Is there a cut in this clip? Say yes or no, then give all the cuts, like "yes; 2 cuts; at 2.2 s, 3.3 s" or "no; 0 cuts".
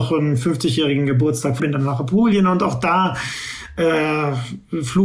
yes; 1 cut; at 1.6 s